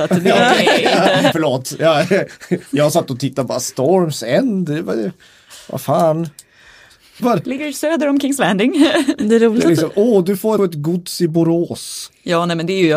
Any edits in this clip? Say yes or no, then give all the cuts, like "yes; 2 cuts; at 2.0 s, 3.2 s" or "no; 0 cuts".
yes; 3 cuts; at 1.3 s, 7.2 s, 10.6 s